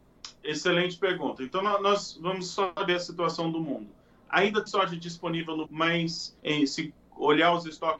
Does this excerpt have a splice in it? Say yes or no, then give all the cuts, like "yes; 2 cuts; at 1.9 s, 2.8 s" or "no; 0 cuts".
yes; 4 cuts; at 2.9 s, 4.7 s, 5.6 s, 6.4 s